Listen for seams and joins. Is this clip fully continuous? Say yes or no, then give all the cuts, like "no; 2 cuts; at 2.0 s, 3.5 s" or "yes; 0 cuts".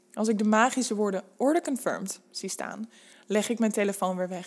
yes; 0 cuts